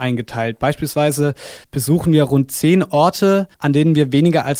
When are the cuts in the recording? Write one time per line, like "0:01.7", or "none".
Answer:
0:01.6
0:03.5